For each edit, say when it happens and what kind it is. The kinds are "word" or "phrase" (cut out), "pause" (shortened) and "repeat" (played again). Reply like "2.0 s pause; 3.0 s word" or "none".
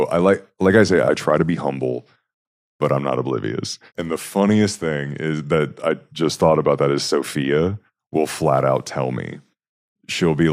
1.1 s phrase; 3.9 s pause